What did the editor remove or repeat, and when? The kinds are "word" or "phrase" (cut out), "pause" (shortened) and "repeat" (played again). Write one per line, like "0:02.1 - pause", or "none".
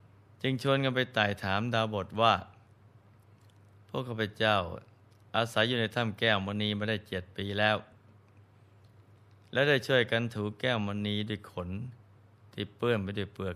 none

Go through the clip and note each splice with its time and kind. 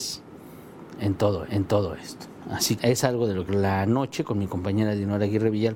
0:01.5 - repeat
0:02.8 - phrase
0:03.5 - phrase

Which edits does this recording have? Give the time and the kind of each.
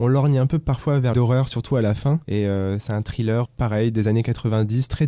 0:01.1 - phrase
0:02.2 - pause
0:03.4 - word

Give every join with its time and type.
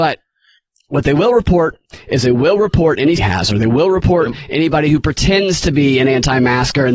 0:03.2 - phrase

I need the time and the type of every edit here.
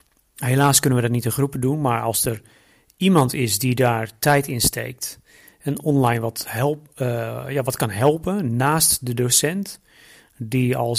none

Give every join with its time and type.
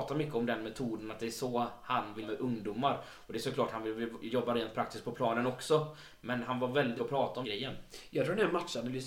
0:02.2 - word
0:07.0 - word
0:07.4 - word

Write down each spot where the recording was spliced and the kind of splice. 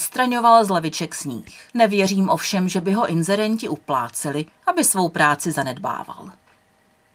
0:01.7 - pause
0:04.5 - pause

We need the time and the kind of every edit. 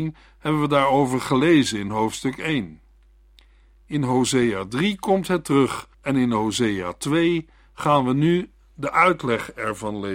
0:05.9 - pause

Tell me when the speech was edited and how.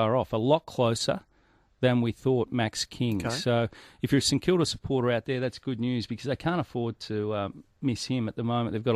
none

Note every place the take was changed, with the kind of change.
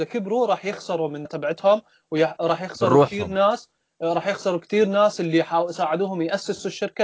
0:01.2 - word

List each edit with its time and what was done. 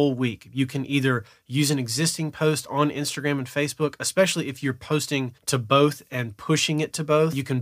0:05.4 - pause

